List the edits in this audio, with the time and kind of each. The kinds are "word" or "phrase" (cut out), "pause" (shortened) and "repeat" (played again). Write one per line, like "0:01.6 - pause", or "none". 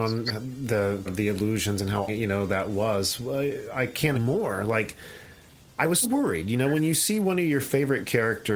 0:01.1 - word
0:02.1 - word
0:04.1 - word
0:06.0 - word